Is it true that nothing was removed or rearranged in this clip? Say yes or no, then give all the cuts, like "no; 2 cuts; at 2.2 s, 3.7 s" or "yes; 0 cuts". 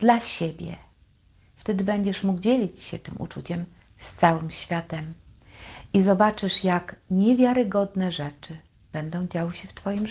yes; 0 cuts